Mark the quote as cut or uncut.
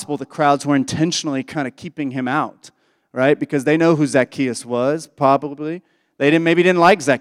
uncut